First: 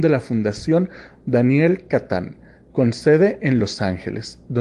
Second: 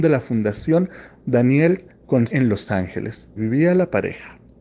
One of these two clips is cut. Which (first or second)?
second